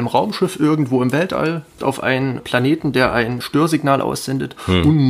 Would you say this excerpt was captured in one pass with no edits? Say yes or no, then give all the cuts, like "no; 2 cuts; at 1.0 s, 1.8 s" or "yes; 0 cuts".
no; 3 cuts; at 1.8 s, 2.4 s, 3.4 s